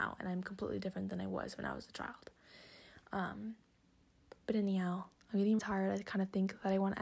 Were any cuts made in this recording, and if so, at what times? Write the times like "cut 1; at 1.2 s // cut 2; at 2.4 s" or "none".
cut 1; at 5.6 s